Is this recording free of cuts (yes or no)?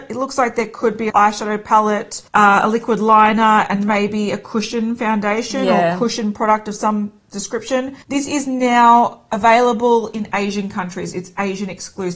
no